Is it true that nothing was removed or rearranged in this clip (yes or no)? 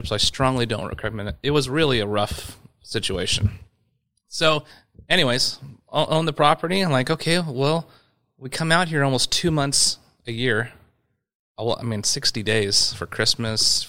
yes